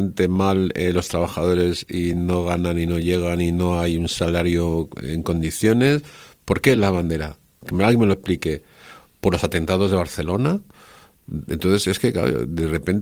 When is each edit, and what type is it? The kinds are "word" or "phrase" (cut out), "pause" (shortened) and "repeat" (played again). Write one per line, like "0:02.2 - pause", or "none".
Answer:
none